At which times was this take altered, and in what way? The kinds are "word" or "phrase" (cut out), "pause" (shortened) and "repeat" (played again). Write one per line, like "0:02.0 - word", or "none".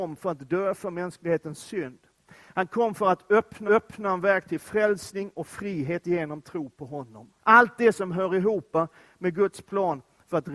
0:03.7 - repeat
0:07.4 - pause